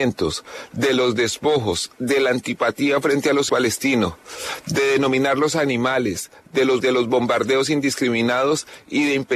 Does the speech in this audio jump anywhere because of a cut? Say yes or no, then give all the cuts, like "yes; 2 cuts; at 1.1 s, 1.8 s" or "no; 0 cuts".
yes; 2 cuts; at 3.5 s, 6.8 s